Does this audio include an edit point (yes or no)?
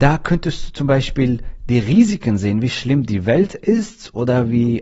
no